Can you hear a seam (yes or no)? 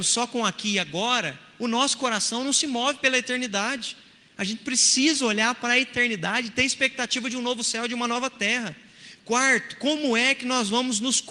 no